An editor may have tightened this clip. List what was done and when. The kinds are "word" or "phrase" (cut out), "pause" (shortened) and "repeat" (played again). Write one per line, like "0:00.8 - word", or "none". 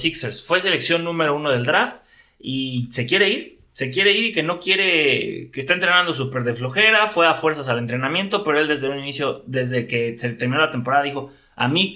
none